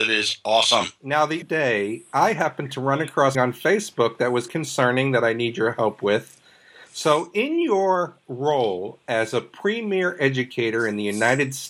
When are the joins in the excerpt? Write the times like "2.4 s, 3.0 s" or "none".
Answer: 1.4 s, 3.3 s, 4.5 s